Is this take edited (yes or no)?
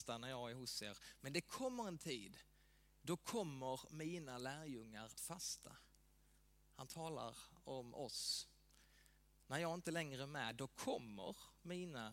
yes